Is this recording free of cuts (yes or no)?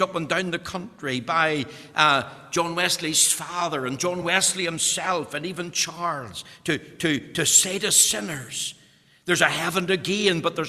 yes